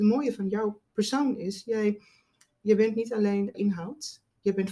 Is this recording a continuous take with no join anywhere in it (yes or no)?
no